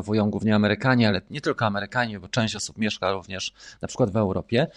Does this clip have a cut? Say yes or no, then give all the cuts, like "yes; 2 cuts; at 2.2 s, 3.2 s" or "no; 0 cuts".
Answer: no; 0 cuts